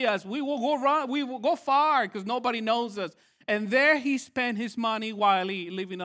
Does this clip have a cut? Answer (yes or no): no